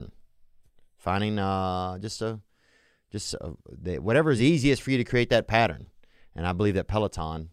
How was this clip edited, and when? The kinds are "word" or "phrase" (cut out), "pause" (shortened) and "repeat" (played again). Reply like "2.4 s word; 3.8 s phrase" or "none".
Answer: none